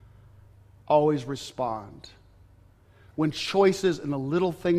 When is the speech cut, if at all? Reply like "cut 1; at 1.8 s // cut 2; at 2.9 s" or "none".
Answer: none